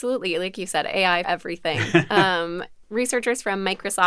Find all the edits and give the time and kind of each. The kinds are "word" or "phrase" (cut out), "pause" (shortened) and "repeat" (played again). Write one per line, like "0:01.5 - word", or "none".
0:01.2 - word
0:02.8 - word